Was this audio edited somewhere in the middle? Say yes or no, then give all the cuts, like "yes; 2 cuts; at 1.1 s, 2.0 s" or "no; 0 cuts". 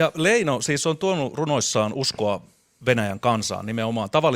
no; 0 cuts